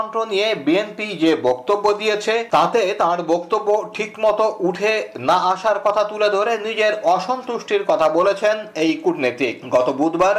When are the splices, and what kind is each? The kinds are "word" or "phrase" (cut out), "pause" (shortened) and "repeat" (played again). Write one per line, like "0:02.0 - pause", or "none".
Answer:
none

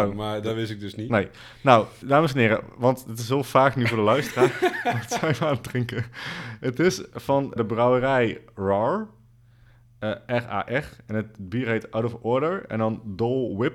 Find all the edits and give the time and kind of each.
0:02.0 - word
0:07.6 - word

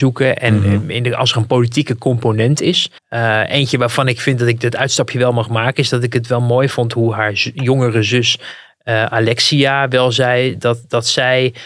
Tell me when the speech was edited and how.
0:03.0 - pause

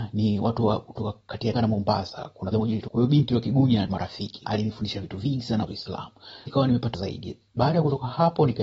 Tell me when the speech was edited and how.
0:01.5 - word
0:02.5 - word
0:02.9 - word
0:03.9 - word
0:04.4 - word
0:05.7 - word
0:06.5 - word
0:06.9 - word

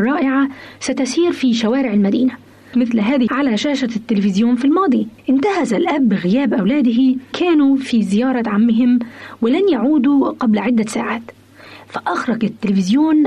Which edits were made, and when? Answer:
0:02.7 - phrase
0:03.3 - word
0:05.2 - pause
0:07.3 - phrase

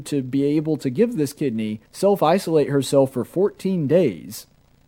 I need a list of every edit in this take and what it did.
0:01.9 - pause

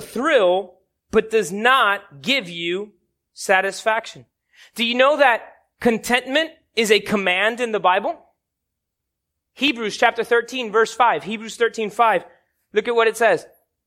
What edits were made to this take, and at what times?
none

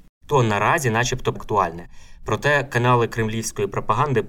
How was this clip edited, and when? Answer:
0:01.4 - phrase

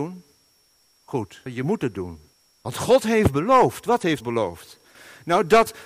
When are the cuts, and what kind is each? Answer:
0:01.5 - word
0:02.3 - pause
0:04.2 - word

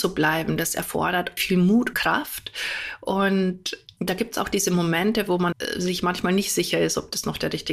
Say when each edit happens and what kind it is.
0:01.4 - word
0:01.9 - word
0:04.0 - word
0:05.5 - word

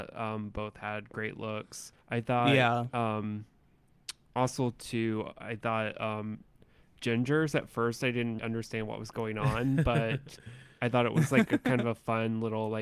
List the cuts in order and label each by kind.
0:02.0 - pause
0:08.4 - word

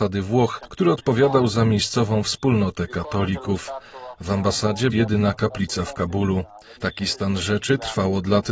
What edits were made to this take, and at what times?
0:04.9 - phrase
0:06.8 - pause

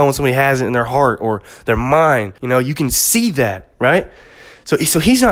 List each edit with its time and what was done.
0:02.4 - pause

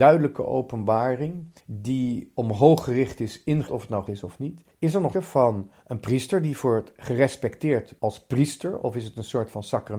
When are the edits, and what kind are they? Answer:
0:01.6 - pause
0:03.7 - word
0:04.1 - word
0:04.7 - pause
0:05.1 - word
0:05.8 - pause
0:08.0 - pause

